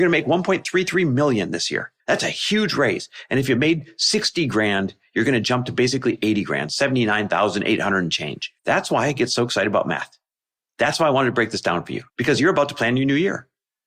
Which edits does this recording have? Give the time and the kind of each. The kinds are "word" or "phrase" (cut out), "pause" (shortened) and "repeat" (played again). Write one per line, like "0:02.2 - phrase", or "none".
0:02.0 - pause
0:08.6 - pause
0:12.1 - pause